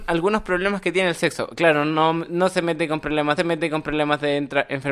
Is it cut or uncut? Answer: cut